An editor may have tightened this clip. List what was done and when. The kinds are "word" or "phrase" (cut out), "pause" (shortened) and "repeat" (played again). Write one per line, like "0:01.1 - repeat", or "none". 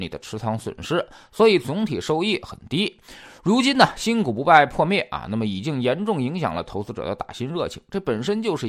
none